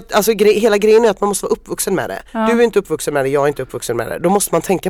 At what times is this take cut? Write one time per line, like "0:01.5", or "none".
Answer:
0:02.3